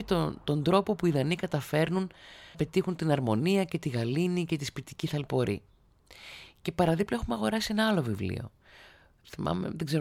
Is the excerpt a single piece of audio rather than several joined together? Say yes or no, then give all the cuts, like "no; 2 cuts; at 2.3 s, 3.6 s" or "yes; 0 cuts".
no; 1 cut; at 2.5 s